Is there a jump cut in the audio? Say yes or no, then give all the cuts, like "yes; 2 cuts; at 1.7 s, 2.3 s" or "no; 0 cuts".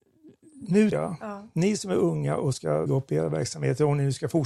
yes; 2 cuts; at 0.9 s, 2.9 s